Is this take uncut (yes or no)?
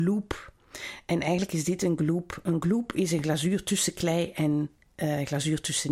yes